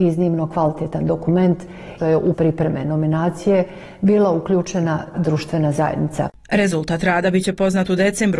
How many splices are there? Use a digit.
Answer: 3